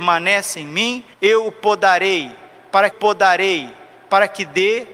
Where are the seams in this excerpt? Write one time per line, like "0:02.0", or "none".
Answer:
0:01.1
0:02.9

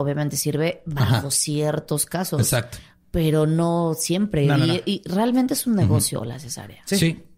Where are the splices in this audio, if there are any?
none

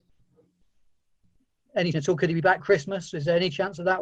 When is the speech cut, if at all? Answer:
0:01.9
0:02.6

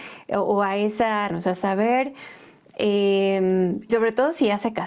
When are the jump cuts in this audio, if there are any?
0:01.3
0:03.9

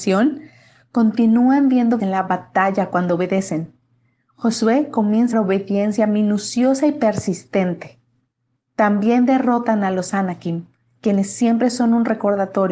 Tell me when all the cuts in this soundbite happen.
0:02.0
0:05.3

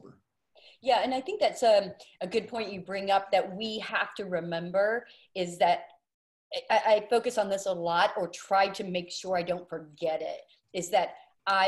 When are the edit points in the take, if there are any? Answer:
none

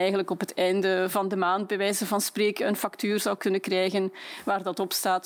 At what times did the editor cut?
none

